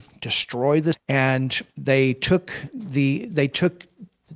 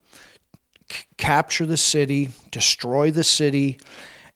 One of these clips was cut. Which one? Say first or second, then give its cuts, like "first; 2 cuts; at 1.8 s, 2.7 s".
first; 2 cuts; at 0.9 s, 1.7 s